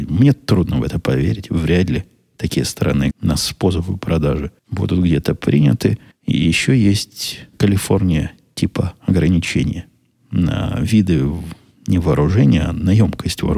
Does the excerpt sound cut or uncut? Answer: cut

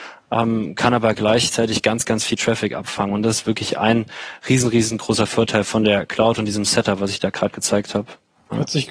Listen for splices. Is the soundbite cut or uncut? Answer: uncut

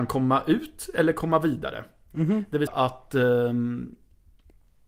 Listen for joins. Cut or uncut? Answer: cut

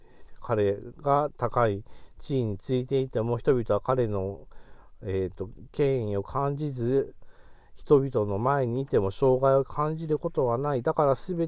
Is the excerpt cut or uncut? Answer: uncut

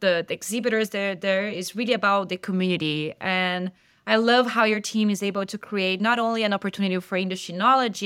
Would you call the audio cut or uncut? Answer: uncut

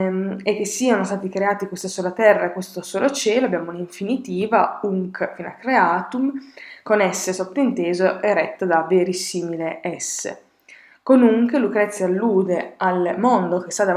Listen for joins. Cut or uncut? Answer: uncut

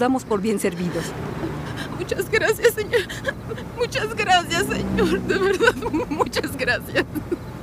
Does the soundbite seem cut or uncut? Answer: uncut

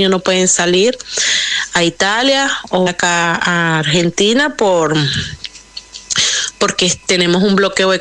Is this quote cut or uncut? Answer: cut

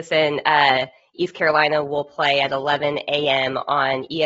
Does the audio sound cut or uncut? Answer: uncut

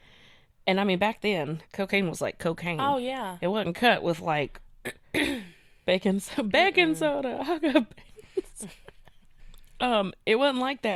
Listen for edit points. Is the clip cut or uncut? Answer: cut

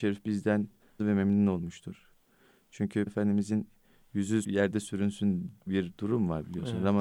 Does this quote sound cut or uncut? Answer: cut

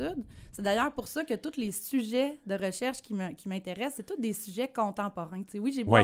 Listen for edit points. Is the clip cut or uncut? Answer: uncut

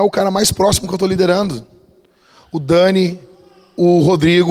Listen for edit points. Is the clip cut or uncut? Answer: uncut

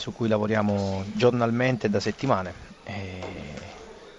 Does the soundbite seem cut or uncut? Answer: cut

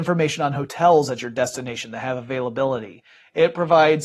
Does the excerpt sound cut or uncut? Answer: uncut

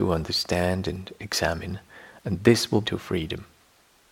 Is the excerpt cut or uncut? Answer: cut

